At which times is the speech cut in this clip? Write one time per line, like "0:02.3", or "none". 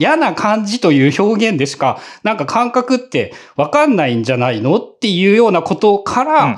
none